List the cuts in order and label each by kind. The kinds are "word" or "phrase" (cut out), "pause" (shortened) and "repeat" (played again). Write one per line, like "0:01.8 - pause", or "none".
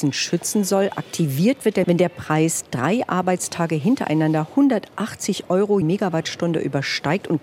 0:01.8 - word
0:05.8 - word